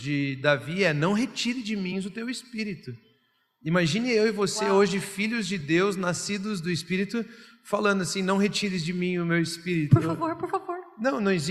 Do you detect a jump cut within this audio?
no; 0 cuts

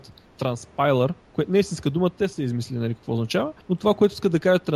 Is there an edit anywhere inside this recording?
yes; 2 cuts; at 1.2 s, 3.6 s

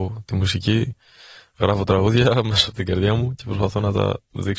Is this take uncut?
yes; 0 cuts

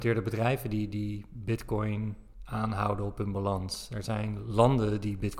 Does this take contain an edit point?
no; 0 cuts

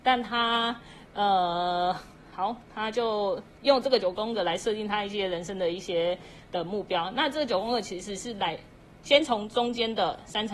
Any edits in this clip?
yes; 1 cut; at 3.5 s

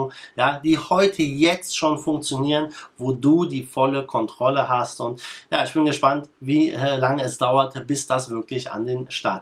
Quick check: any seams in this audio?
no; 0 cuts

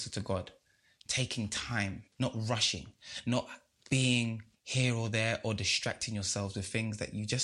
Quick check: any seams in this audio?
yes; 2 cuts; at 2.1 s, 4.5 s

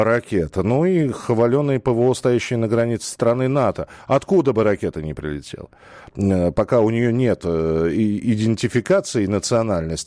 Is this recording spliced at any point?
no; 0 cuts

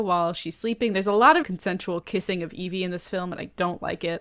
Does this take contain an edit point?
yes; 1 cut; at 1.4 s

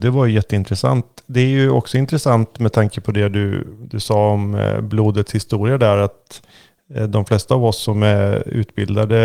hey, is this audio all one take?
yes; 0 cuts

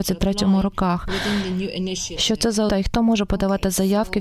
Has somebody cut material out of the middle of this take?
yes; 1 cut; at 2.7 s

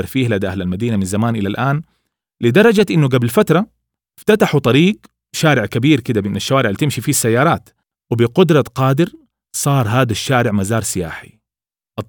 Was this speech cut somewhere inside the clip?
no; 0 cuts

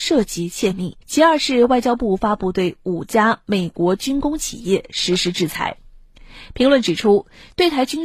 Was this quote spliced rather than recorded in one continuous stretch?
yes; 1 cut; at 1.0 s

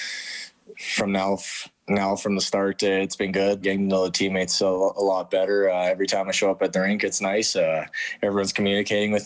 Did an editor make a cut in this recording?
yes; 1 cut; at 3.6 s

